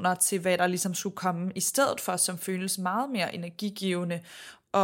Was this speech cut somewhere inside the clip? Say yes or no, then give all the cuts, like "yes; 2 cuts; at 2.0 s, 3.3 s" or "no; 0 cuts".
no; 0 cuts